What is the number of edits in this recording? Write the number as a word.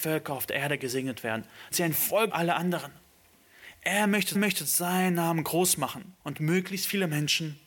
four